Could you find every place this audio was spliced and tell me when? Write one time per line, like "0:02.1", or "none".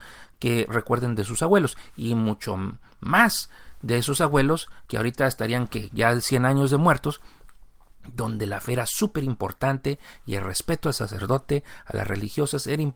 none